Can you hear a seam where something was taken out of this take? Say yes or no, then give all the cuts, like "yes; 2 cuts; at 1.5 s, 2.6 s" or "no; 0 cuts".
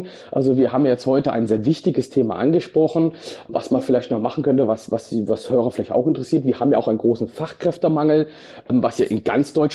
no; 0 cuts